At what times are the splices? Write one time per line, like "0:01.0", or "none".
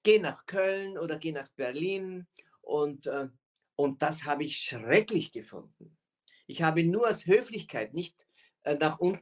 none